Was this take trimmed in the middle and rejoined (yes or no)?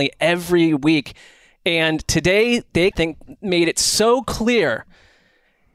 yes